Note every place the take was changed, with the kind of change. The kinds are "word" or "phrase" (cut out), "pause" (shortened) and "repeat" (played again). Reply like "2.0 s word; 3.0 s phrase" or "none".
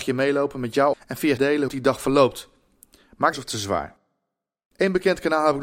0.9 s word; 1.4 s word; 1.7 s phrase; 3.3 s phrase